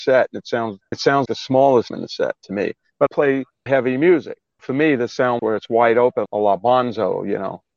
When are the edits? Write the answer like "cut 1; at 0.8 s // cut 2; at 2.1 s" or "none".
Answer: cut 1; at 0.9 s // cut 2; at 1.3 s // cut 3; at 1.9 s // cut 4; at 3.1 s // cut 5; at 3.7 s // cut 6; at 4.6 s // cut 7; at 5.4 s // cut 8; at 6.3 s